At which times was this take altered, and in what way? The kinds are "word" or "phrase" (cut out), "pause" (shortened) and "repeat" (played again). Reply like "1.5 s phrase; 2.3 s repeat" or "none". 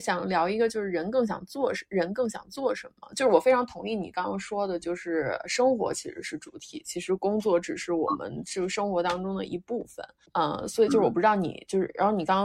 10.2 s pause